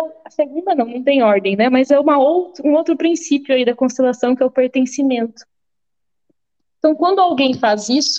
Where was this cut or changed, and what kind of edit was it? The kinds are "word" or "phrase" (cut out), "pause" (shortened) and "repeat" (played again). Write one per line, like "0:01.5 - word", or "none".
none